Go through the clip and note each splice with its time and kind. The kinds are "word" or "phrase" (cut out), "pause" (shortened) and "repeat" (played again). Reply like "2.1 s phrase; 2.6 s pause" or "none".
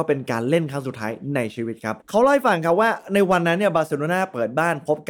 2.0 s pause